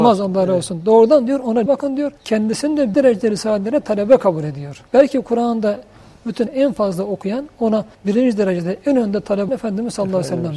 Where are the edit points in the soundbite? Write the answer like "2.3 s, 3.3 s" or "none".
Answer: 1.7 s, 2.2 s, 2.9 s, 4.9 s, 6.5 s, 7.9 s, 9.5 s